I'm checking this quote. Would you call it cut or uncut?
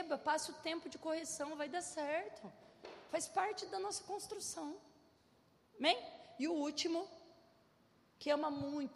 uncut